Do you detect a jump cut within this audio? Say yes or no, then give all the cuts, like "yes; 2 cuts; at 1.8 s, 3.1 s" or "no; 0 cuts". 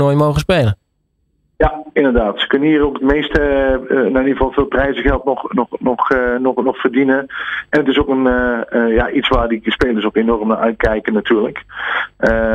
no; 0 cuts